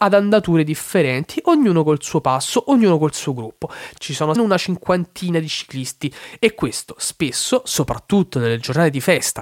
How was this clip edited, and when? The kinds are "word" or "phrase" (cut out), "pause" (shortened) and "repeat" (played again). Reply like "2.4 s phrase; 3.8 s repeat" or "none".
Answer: 4.4 s phrase